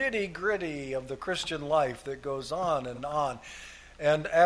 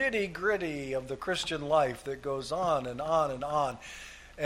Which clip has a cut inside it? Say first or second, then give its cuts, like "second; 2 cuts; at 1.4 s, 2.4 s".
first; 1 cut; at 2.9 s